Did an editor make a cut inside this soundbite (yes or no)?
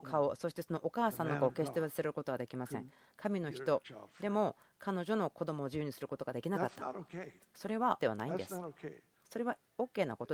yes